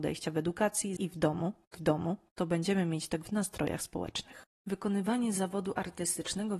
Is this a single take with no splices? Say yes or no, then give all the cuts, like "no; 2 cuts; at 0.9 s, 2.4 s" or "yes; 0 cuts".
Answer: no; 4 cuts; at 1.0 s, 1.7 s, 3.2 s, 4.5 s